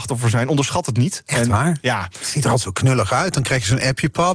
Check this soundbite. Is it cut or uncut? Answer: uncut